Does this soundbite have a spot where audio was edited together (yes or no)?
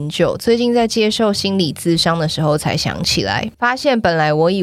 yes